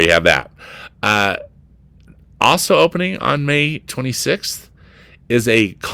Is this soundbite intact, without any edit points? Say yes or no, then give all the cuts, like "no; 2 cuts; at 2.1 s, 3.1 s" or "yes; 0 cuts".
yes; 0 cuts